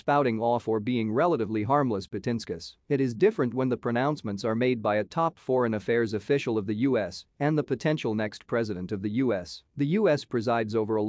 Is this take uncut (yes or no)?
no